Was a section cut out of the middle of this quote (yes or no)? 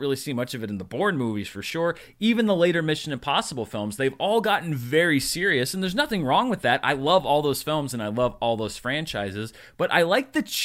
no